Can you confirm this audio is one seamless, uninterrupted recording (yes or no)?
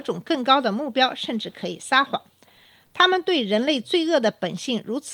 yes